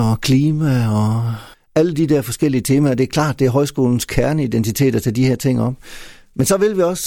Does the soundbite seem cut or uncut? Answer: cut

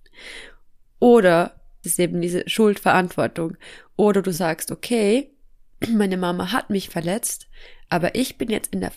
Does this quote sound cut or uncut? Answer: cut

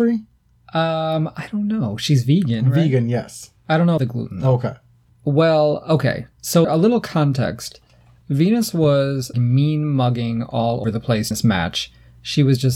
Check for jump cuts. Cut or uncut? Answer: cut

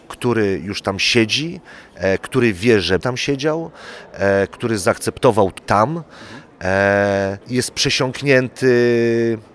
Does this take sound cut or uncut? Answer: cut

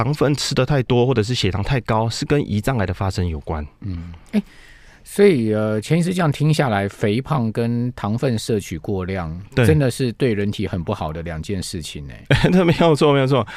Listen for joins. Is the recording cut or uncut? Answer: uncut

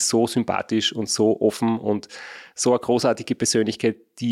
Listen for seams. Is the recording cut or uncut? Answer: uncut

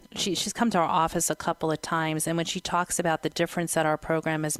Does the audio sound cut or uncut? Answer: uncut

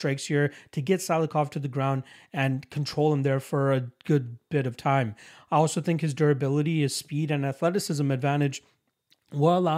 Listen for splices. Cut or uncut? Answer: uncut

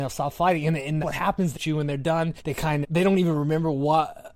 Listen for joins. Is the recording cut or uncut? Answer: cut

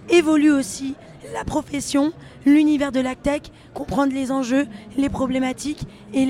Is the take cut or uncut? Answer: uncut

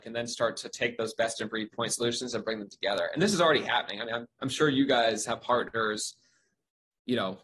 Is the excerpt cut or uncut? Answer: uncut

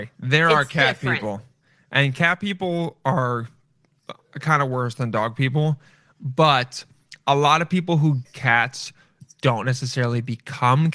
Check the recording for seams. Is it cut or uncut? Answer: cut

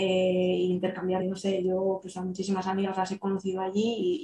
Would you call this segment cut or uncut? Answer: cut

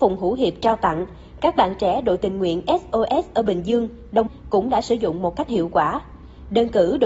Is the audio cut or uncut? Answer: cut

